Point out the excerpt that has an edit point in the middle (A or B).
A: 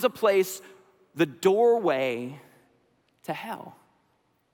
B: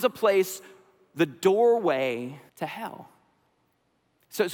B